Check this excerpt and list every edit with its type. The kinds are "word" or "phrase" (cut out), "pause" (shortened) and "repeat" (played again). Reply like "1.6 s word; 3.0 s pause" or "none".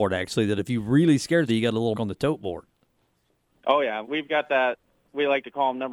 1.5 s word; 1.9 s word; 4.0 s word